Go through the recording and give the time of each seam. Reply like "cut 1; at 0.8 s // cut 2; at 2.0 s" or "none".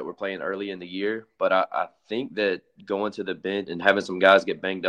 cut 1; at 3.7 s